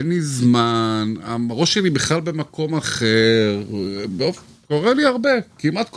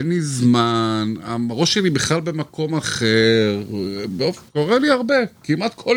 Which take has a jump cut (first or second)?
second